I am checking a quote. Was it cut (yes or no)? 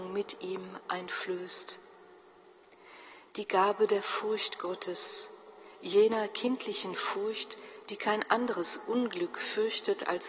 no